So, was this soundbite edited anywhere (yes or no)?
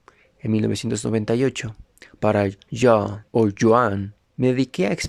yes